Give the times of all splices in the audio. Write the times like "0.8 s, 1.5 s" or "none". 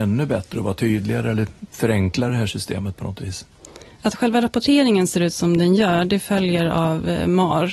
none